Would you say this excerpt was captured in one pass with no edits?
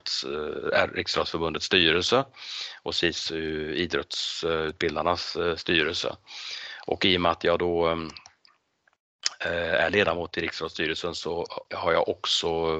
no; 1 cut; at 11.7 s

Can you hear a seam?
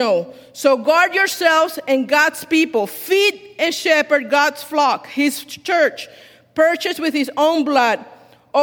no; 0 cuts

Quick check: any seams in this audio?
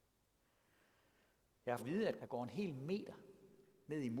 yes; 2 cuts; at 1.8 s, 2.2 s

